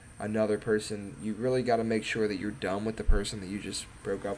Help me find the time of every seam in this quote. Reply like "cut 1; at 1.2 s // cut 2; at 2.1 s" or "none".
none